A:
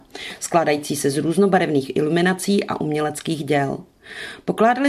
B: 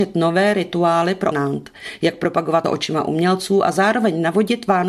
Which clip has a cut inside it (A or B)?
B